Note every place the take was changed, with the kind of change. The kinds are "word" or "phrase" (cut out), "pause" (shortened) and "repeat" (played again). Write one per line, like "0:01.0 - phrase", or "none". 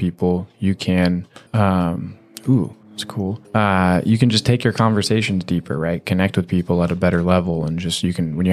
0:01.5 - pause
0:02.8 - pause
0:03.4 - pause